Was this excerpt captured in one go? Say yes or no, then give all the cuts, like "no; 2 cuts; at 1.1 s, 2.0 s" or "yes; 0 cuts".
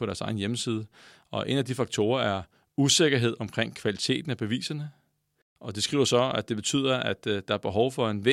yes; 0 cuts